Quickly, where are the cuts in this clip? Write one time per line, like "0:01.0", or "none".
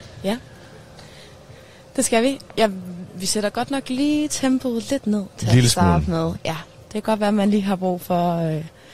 none